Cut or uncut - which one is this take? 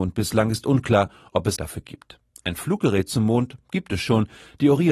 cut